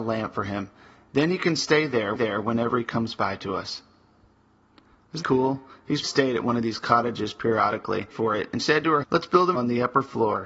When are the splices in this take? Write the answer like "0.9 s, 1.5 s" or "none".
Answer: 2.1 s, 5.2 s, 6.0 s, 8.1 s, 8.6 s, 9.0 s, 9.5 s